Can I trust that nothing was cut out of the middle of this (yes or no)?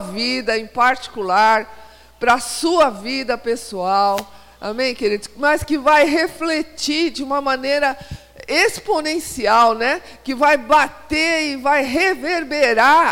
yes